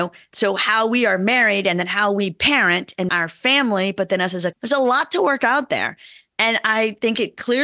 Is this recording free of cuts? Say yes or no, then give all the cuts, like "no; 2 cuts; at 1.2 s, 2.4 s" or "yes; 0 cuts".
no; 2 cuts; at 3.1 s, 4.5 s